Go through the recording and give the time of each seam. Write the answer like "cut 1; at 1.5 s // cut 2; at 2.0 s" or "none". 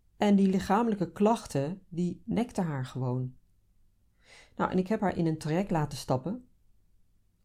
none